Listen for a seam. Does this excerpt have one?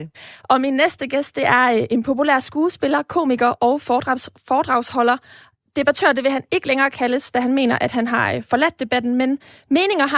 no; 0 cuts

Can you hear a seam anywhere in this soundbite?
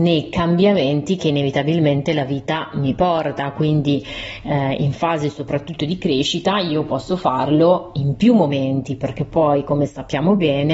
no; 0 cuts

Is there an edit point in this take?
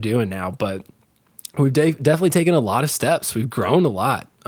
no; 0 cuts

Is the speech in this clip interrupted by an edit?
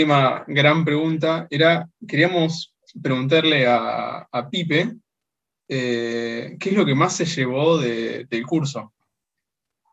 no; 0 cuts

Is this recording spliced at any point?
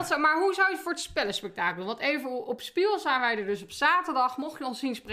no; 0 cuts

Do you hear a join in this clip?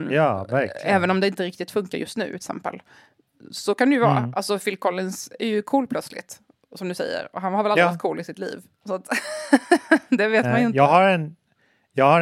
no; 0 cuts

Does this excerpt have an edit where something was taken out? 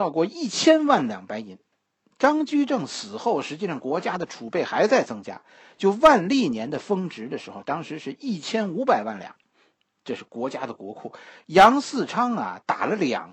no; 0 cuts

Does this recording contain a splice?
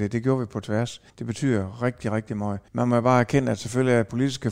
yes; 2 cuts; at 1.1 s, 2.7 s

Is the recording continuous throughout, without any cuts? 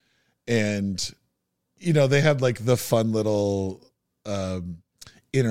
yes; 0 cuts

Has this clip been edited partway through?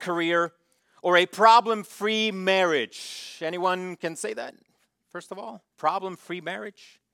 no; 0 cuts

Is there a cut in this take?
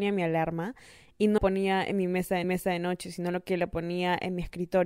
yes; 2 cuts; at 1.4 s, 2.4 s

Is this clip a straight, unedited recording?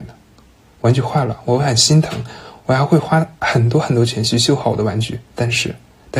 no; 1 cut; at 5.3 s

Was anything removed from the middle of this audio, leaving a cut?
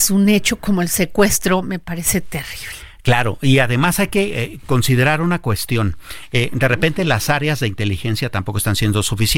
no; 0 cuts

